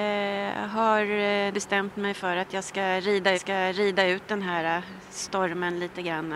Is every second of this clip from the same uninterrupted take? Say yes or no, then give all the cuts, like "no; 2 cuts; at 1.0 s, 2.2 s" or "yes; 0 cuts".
no; 2 cuts; at 1.5 s, 3.3 s